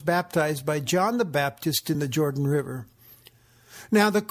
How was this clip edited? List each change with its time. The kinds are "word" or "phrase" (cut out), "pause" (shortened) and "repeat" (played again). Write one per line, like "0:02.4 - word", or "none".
none